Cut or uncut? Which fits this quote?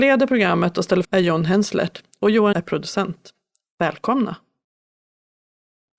cut